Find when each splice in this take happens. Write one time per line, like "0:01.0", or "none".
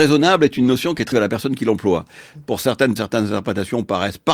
0:01.1
0:03.0